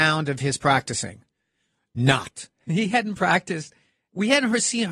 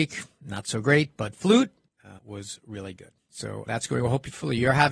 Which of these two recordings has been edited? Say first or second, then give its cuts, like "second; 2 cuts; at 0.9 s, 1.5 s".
second; 2 cuts; at 2.2 s, 3.7 s